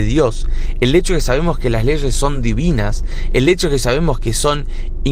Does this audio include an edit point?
no; 0 cuts

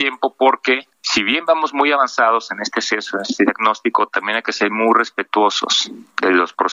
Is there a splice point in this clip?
yes; 1 cut; at 0.9 s

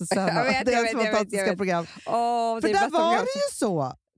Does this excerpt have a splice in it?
no; 0 cuts

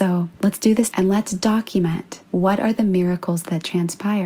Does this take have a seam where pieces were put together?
yes; 2 cuts; at 0.9 s, 2.2 s

